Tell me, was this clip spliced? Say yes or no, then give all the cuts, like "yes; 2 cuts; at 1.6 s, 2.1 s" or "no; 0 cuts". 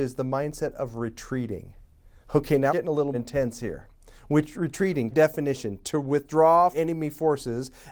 yes; 4 cuts; at 2.7 s, 3.1 s, 5.1 s, 6.7 s